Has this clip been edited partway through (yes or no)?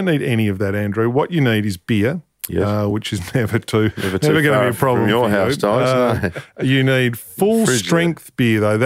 no